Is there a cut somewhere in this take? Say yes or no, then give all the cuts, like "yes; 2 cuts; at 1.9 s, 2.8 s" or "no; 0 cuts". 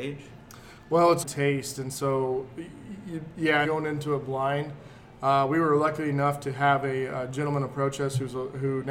yes; 2 cuts; at 1.2 s, 3.6 s